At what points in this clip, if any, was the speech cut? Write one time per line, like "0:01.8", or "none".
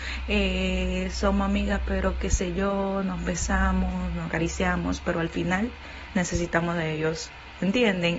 none